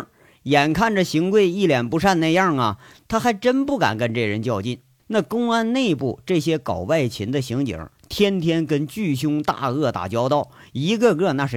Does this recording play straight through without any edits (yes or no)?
no